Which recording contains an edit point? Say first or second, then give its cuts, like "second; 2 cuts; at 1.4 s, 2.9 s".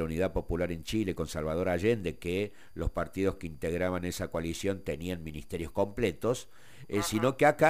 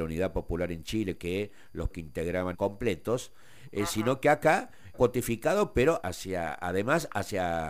second; 5 cuts; at 1.2 s, 1.9 s, 2.5 s, 4.9 s, 6.0 s